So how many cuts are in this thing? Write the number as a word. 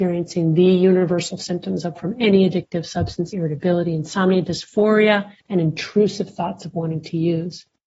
three